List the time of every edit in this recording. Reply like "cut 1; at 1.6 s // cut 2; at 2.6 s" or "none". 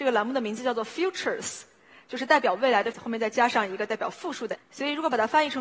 cut 1; at 2.9 s // cut 2; at 4.6 s